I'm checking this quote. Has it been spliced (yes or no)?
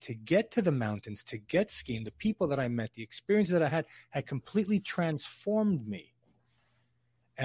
no